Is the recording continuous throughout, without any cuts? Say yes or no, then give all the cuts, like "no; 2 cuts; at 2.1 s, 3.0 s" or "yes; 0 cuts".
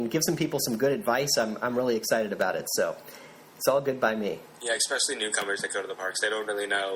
no; 1 cut; at 4.5 s